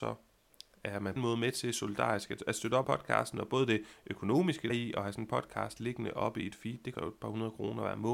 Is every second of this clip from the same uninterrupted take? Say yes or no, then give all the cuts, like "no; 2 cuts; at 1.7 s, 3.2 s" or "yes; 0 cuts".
no; 4 cuts; at 1.2 s, 2.8 s, 4.7 s, 7.0 s